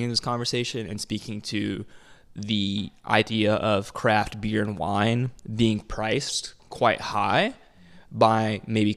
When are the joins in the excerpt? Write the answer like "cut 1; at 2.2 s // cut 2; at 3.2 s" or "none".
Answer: none